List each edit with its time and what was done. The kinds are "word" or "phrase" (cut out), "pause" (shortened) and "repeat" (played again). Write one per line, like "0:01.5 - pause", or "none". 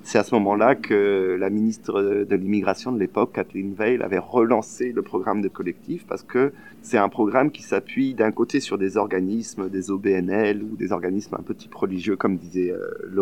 0:05.5 - word